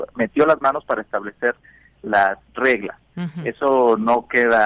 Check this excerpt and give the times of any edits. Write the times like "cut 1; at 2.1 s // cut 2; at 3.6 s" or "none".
none